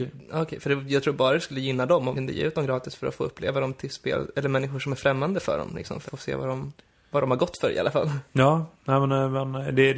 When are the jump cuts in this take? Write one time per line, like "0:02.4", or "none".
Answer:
0:02.1
0:06.1